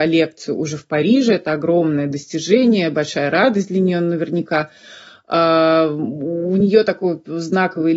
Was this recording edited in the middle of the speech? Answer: no; 0 cuts

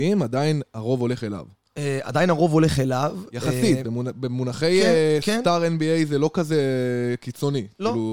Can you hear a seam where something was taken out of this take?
no; 0 cuts

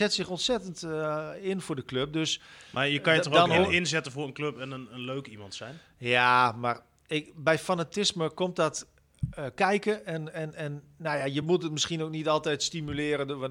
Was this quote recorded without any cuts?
yes; 0 cuts

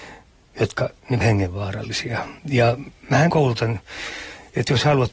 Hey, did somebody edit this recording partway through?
yes; 3 cuts; at 1.2 s, 2.4 s, 3.3 s

